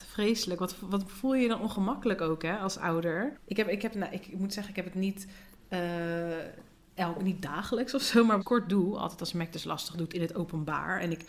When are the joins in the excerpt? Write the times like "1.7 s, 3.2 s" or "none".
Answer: 3.4 s, 8.4 s

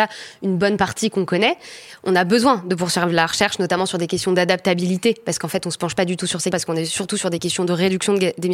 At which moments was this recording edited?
6.5 s

